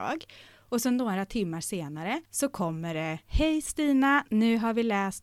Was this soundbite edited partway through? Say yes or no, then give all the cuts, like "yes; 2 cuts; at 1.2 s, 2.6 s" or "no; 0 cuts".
yes; 2 cuts; at 2.2 s, 3.2 s